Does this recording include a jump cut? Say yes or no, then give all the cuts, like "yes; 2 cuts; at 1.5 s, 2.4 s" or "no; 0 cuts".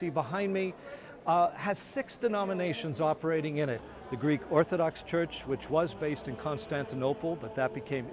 no; 0 cuts